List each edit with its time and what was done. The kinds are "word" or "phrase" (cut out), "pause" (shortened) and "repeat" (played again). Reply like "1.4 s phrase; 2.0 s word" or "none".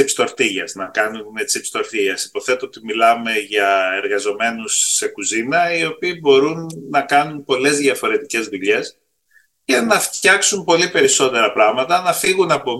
none